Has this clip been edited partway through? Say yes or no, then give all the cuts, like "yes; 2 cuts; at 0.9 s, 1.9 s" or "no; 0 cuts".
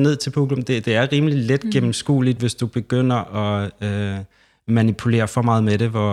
no; 0 cuts